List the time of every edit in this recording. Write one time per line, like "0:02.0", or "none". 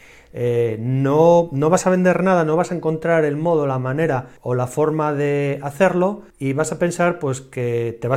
0:04.4
0:06.3